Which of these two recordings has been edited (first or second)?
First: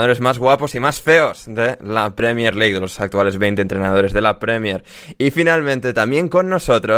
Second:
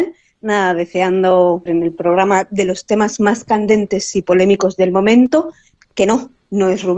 second